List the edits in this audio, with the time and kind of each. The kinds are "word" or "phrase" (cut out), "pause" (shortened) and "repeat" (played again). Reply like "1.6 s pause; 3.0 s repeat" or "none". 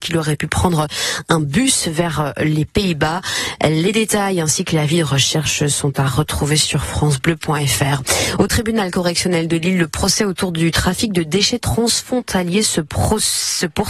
none